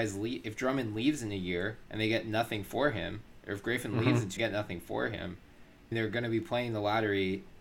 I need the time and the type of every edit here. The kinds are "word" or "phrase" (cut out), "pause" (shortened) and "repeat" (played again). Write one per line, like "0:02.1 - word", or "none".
0:01.8 - pause
0:04.4 - phrase
0:05.9 - word